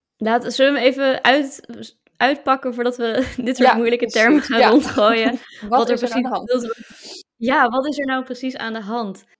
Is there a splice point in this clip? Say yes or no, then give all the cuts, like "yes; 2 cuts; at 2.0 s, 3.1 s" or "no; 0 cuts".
no; 0 cuts